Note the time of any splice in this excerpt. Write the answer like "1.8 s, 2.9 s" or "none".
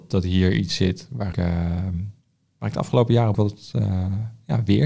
1.3 s, 3.3 s